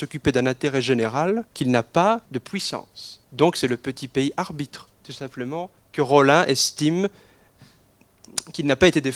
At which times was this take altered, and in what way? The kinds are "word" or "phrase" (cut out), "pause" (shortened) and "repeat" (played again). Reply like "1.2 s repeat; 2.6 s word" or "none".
1.5 s pause; 2.3 s pause; 3.2 s pause; 4.9 s pause; 5.8 s pause